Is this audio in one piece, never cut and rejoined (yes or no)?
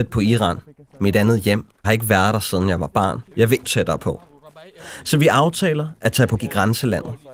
no